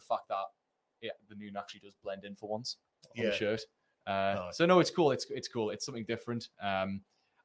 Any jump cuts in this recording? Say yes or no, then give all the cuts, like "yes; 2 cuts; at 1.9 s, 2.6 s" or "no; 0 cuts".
no; 0 cuts